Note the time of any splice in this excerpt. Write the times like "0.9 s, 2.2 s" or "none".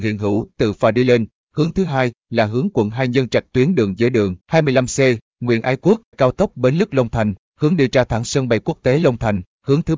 4.0 s, 4.4 s, 6.1 s

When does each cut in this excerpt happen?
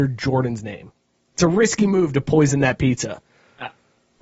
none

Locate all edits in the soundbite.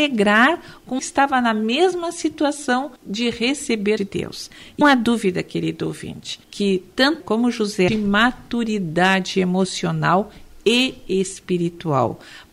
1.0 s, 3.0 s, 4.0 s, 4.8 s, 6.4 s, 7.2 s, 7.9 s

